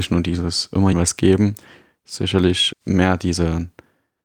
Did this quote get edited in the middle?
yes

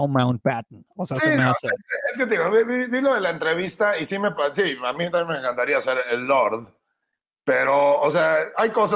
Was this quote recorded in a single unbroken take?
yes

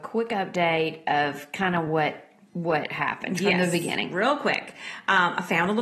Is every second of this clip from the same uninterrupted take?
yes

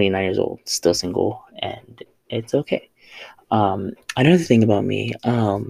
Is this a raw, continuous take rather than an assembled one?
yes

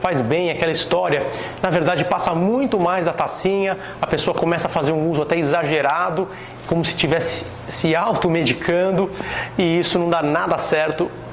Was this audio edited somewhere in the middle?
no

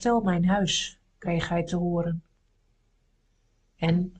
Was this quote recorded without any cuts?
yes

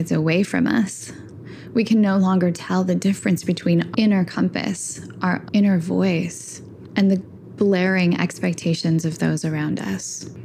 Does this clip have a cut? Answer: yes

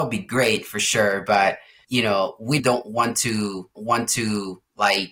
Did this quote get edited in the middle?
yes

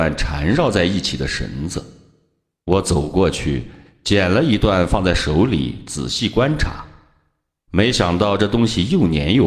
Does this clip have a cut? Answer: no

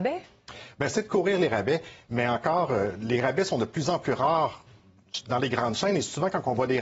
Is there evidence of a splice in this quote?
no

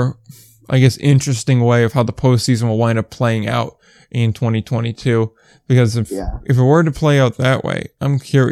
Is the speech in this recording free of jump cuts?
yes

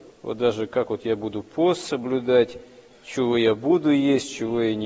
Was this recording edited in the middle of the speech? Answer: no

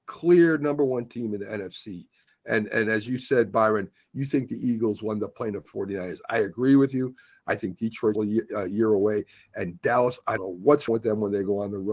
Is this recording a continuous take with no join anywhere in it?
no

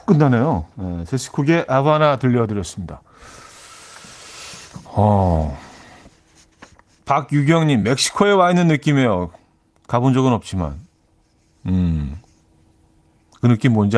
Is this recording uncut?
yes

